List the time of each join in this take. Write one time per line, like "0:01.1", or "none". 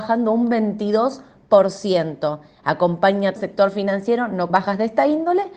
0:03.4
0:04.5